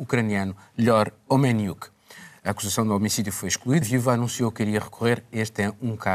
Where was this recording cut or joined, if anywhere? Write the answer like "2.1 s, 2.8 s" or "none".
3.8 s